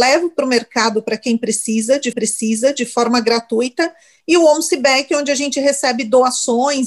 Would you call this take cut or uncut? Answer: cut